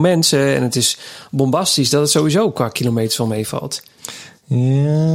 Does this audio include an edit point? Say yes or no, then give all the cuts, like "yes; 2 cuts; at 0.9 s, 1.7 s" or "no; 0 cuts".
no; 0 cuts